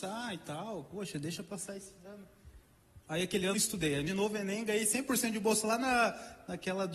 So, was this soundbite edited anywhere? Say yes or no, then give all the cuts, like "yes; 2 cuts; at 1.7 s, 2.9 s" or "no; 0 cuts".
yes; 3 cuts; at 3.0 s, 3.5 s, 4.1 s